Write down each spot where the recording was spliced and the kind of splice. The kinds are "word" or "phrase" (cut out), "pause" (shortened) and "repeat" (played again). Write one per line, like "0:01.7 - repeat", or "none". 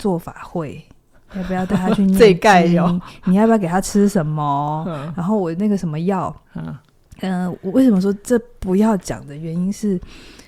0:06.4 - pause